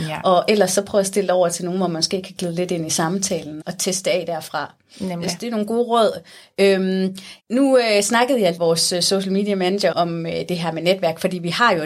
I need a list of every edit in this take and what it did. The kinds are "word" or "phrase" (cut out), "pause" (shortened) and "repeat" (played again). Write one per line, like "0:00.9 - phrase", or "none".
0:03.6 - word
0:07.4 - pause
0:08.6 - phrase
0:09.9 - word